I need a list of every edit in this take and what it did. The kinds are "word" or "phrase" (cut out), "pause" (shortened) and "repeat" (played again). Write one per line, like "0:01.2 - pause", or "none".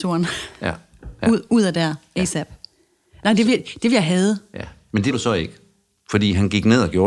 0:05.1 - word

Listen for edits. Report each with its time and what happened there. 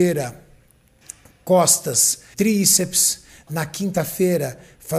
0:02.3 - word

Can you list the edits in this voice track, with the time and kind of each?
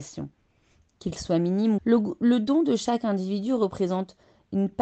0:01.8 - phrase

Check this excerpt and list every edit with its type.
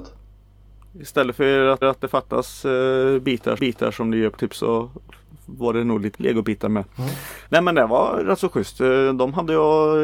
0:01.8 - repeat
0:03.6 - repeat
0:04.4 - word
0:06.1 - word
0:07.5 - pause

